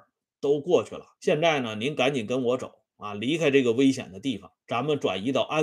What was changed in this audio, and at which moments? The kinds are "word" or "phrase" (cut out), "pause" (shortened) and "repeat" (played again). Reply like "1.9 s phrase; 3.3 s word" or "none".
1.2 s pause; 4.6 s pause